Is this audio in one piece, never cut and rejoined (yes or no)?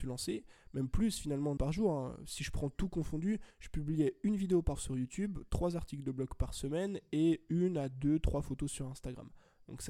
no